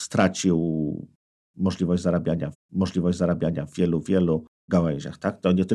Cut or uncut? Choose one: cut